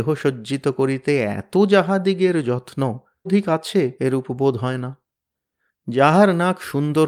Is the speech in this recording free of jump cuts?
no; 2 cuts; at 3.2 s, 4.0 s

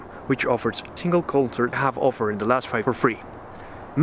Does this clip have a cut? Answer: yes; 3 cuts; at 1.0 s, 1.7 s, 2.8 s

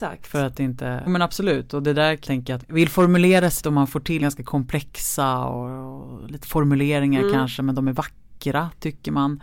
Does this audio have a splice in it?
yes; 6 cuts; at 1.1 s, 2.3 s, 2.6 s, 3.6 s, 4.2 s, 6.4 s

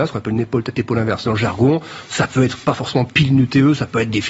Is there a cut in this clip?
no; 0 cuts

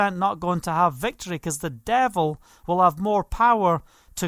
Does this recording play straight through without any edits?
yes; 0 cuts

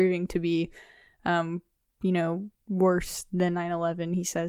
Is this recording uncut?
yes; 0 cuts

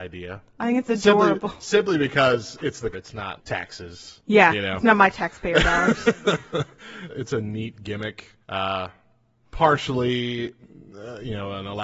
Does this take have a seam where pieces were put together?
yes; 4 cuts; at 2.9 s, 3.4 s, 7.1 s, 8.4 s

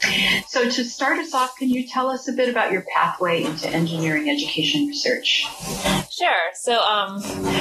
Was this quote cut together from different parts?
no; 0 cuts

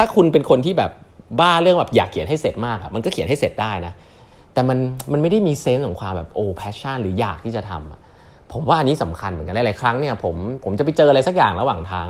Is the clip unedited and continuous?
yes; 0 cuts

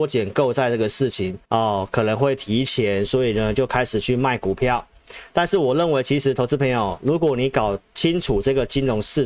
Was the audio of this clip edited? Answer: yes; 1 cut; at 1.4 s

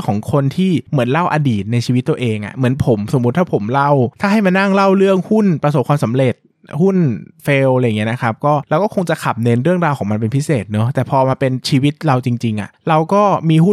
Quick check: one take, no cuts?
yes; 0 cuts

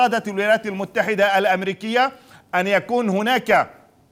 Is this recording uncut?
yes; 0 cuts

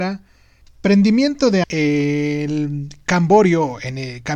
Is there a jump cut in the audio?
yes; 1 cut; at 1.6 s

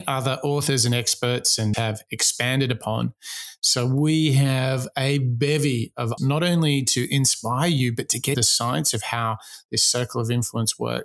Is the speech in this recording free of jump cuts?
no; 3 cuts; at 1.7 s, 6.2 s, 8.3 s

